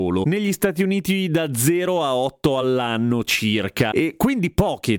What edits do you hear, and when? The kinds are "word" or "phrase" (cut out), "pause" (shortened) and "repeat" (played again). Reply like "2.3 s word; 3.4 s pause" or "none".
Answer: none

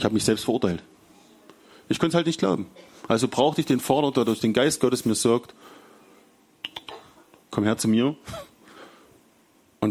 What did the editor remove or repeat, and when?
none

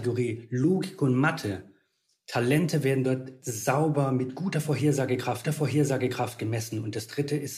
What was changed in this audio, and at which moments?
3.4 s word; 5.4 s repeat

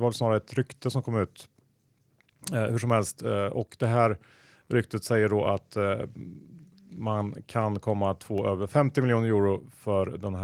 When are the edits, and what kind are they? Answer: none

